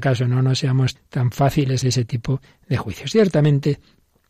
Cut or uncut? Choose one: cut